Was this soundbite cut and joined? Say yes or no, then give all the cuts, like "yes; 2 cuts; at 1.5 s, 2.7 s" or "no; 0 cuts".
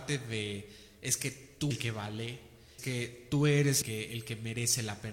yes; 3 cuts; at 1.7 s, 2.8 s, 3.8 s